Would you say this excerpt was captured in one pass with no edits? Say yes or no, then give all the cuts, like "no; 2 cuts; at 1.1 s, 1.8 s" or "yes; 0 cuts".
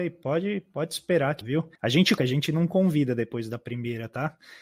no; 3 cuts; at 1.4 s, 1.8 s, 2.2 s